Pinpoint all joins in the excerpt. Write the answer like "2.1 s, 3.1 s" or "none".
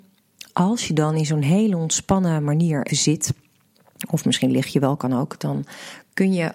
2.9 s